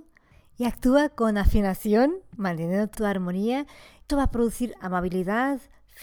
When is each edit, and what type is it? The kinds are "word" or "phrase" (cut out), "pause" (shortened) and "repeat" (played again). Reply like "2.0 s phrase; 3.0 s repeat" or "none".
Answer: 2.9 s word; 4.1 s word